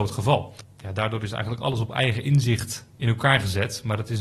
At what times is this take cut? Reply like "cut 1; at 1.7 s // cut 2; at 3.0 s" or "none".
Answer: cut 1; at 2.9 s